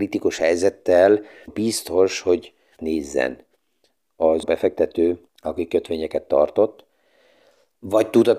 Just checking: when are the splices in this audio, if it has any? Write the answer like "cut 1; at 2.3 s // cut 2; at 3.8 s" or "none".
cut 1; at 1.5 s // cut 2; at 2.8 s // cut 3; at 4.4 s // cut 4; at 5.3 s